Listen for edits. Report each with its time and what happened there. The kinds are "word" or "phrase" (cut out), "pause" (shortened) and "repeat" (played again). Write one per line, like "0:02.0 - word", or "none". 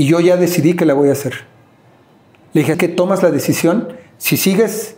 0:02.7 - word